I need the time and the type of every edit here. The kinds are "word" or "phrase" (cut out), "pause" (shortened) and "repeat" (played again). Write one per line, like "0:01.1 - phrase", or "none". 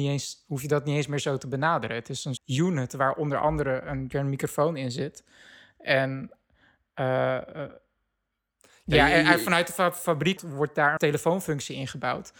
0:02.4 - word
0:04.1 - word
0:10.4 - word
0:11.0 - word